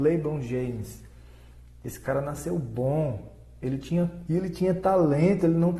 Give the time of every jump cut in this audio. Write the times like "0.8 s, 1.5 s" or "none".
4.3 s